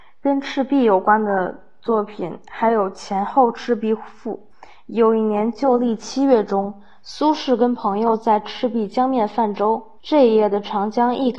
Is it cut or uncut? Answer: cut